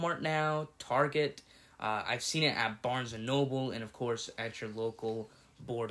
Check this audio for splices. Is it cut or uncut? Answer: uncut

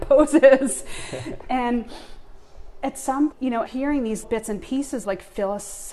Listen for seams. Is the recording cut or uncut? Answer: cut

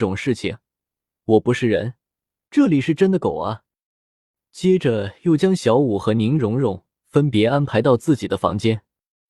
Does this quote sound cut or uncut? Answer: uncut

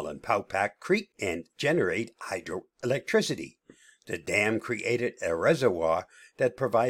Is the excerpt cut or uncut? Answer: uncut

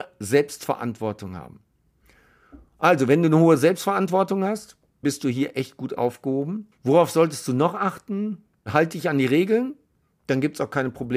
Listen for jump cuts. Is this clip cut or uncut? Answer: cut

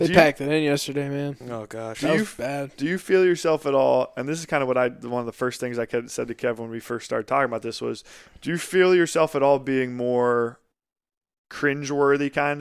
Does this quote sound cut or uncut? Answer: uncut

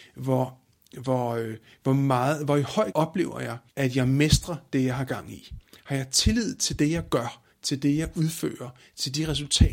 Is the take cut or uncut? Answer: cut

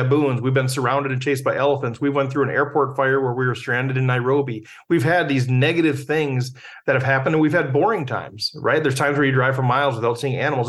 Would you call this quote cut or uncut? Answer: uncut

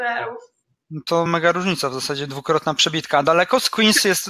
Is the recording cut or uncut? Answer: cut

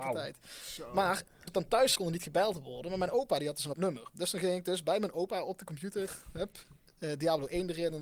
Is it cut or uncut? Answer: cut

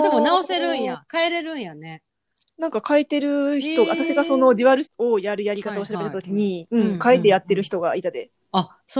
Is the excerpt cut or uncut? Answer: cut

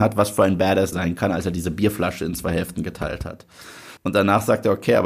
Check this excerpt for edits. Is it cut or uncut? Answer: cut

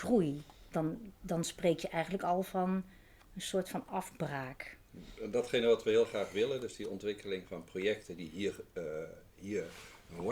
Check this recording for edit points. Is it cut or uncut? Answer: uncut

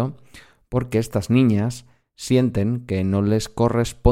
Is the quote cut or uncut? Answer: uncut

